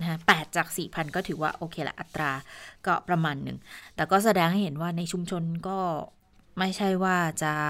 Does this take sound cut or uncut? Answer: uncut